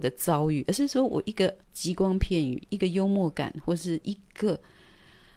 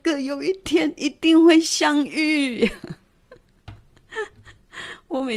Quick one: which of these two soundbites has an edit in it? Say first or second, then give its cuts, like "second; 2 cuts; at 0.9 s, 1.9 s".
first; 1 cut; at 1.6 s